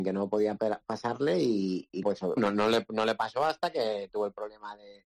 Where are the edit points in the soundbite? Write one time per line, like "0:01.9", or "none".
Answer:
0:02.0
0:02.4